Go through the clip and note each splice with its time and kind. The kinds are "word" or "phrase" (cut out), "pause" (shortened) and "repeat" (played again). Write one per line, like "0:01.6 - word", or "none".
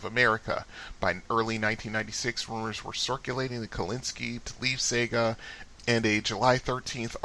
0:04.4 - word